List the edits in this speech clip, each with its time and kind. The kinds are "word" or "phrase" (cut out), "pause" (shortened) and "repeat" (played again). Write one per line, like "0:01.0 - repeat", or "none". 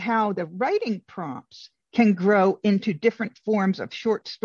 none